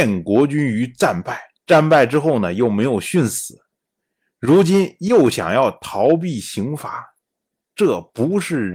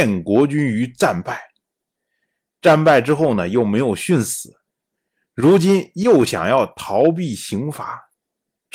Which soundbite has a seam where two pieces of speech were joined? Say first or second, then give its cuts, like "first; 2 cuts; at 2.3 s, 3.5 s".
first; 1 cut; at 1.6 s